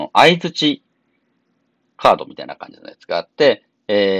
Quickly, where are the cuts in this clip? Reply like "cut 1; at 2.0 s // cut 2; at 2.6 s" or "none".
none